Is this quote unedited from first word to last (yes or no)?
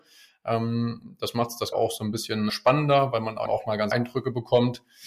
no